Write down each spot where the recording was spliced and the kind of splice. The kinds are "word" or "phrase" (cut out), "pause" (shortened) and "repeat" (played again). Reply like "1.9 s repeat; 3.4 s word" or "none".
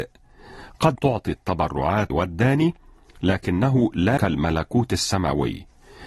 0.9 s word; 2.1 s word; 4.2 s word